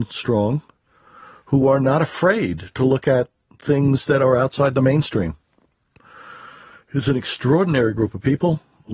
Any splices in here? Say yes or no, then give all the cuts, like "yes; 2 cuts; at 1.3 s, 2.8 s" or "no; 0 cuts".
no; 0 cuts